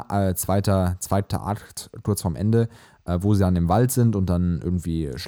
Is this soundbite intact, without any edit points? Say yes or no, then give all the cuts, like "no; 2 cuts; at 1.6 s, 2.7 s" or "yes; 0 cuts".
yes; 0 cuts